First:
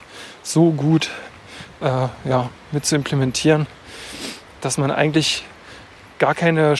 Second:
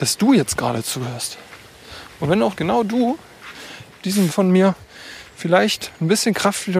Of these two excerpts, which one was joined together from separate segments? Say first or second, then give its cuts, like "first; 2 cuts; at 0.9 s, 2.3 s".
second; 3 cuts; at 2.5 s, 3.9 s, 4.3 s